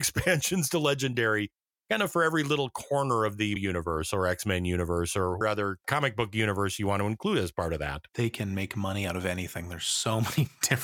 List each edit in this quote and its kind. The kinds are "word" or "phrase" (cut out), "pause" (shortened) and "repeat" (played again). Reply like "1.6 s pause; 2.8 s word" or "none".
3.6 s word; 5.4 s word; 8.1 s pause